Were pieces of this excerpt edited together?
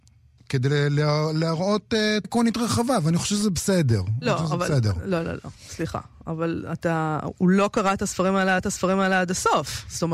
yes; 2 cuts; at 2.2 s, 8.6 s

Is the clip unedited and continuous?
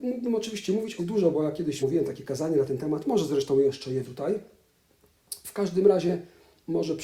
no; 3 cuts; at 1.0 s, 1.8 s, 4.0 s

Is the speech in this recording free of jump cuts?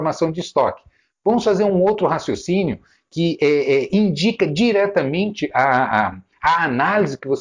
yes; 0 cuts

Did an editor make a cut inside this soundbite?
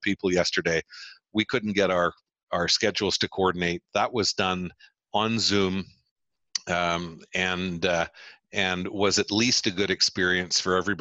no; 0 cuts

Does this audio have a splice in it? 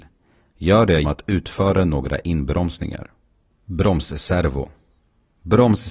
yes; 1 cut; at 1.0 s

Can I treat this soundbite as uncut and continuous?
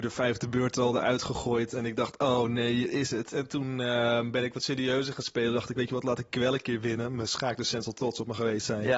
yes; 0 cuts

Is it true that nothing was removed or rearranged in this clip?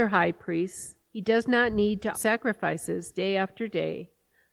no; 2 cuts; at 1.0 s, 2.1 s

